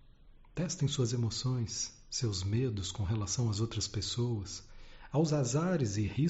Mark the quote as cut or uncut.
uncut